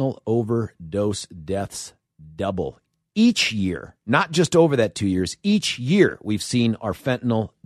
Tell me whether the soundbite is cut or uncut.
uncut